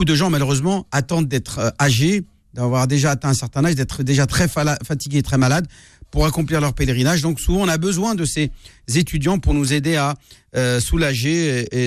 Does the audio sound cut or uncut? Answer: uncut